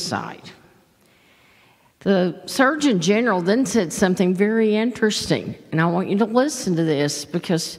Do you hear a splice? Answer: no; 0 cuts

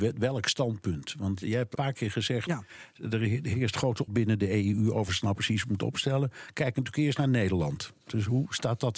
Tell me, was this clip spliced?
yes; 4 cuts; at 1.4 s, 1.7 s, 4.1 s, 5.1 s

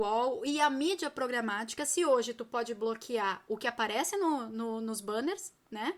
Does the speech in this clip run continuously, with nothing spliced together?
yes; 0 cuts

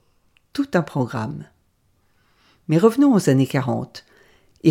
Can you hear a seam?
no; 0 cuts

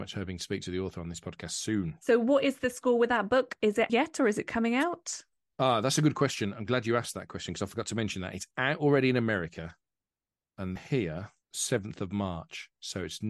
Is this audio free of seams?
no; 2 cuts; at 3.9 s, 10.8 s

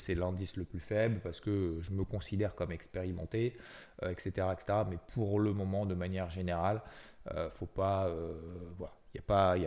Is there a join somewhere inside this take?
no; 0 cuts

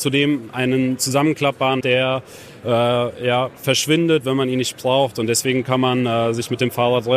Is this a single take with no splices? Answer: no; 1 cut; at 1.8 s

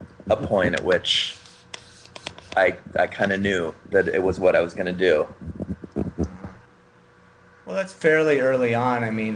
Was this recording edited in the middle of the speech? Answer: no; 0 cuts

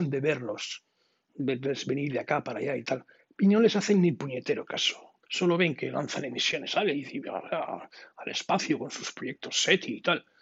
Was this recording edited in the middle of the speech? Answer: yes; 1 cut; at 5.2 s

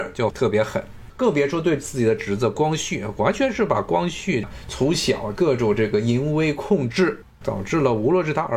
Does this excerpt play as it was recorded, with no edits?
no; 1 cut; at 7.3 s

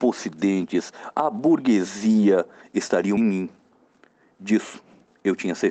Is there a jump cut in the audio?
yes; 1 cut; at 3.2 s

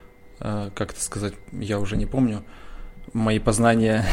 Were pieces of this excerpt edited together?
no; 0 cuts

